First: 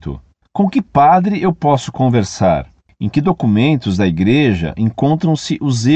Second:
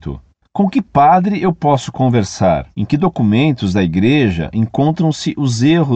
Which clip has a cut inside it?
second; 1 cut; at 2.7 s

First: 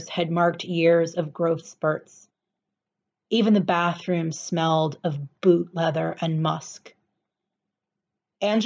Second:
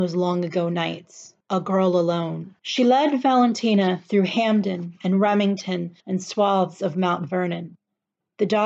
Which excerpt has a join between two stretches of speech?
second; 3 cuts; at 1.4 s, 2.6 s, 6.0 s

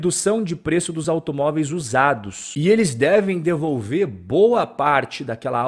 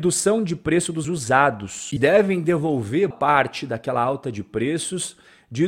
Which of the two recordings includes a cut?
second; 3 cuts; at 1.0 s, 2.0 s, 3.1 s

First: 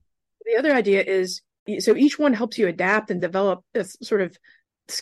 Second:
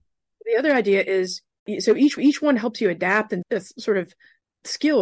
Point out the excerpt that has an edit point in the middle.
second; 2 cuts; at 2.2 s, 3.4 s

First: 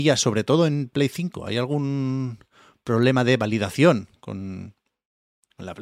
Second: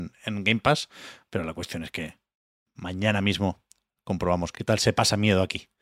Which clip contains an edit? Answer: second; 1 cut; at 4.5 s

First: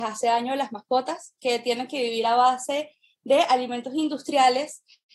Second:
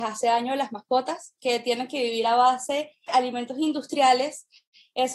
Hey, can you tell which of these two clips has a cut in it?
second; 1 cut; at 3.1 s

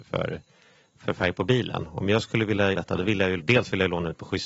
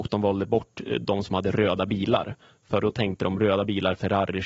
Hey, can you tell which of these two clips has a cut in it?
first; 2 cuts; at 2.7 s, 3.4 s

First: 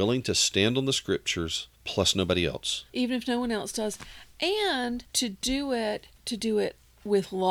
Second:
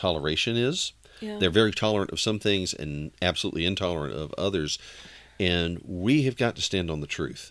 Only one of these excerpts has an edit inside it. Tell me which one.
first; 4 cuts; at 1.7 s, 2.9 s, 5.1 s, 6.2 s

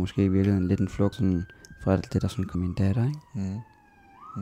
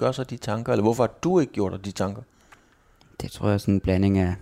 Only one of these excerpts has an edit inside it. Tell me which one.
first; 3 cuts; at 1.1 s, 2.1 s, 2.5 s

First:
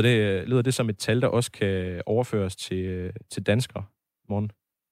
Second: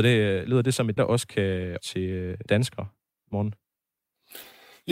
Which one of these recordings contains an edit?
second; 3 cuts; at 1.0 s, 1.8 s, 2.5 s

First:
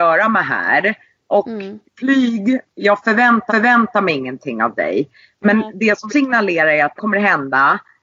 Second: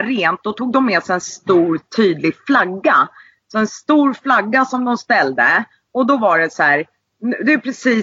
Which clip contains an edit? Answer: first; 4 cuts; at 1.9 s, 3.5 s, 6.1 s, 7.0 s

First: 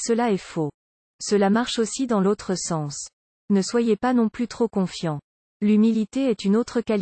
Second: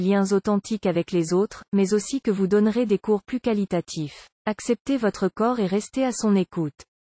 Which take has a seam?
second; 1 cut; at 4.3 s

